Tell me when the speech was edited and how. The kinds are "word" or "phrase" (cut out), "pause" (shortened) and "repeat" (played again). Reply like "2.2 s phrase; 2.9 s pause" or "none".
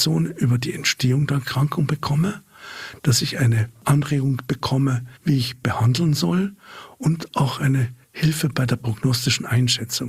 5.2 s pause; 8.0 s pause

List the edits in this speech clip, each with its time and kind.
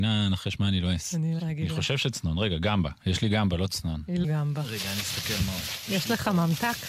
1.4 s word; 4.2 s phrase

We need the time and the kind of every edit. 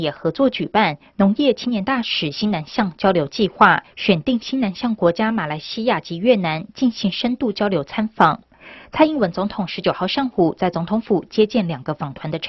3.9 s pause

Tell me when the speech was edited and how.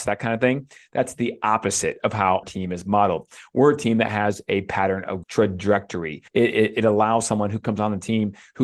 2.4 s word; 5.2 s phrase; 6.3 s pause

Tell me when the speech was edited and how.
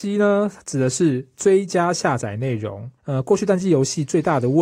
3.0 s pause

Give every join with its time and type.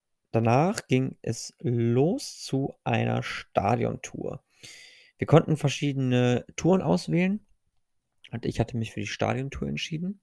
none

